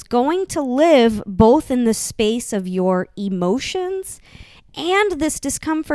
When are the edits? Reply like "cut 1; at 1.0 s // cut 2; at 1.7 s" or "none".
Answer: none